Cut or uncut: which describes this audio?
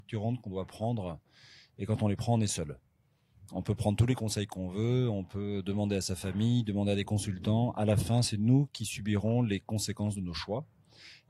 uncut